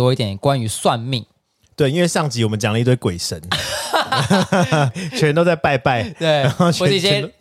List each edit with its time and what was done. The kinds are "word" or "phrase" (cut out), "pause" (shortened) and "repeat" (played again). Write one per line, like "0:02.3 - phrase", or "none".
none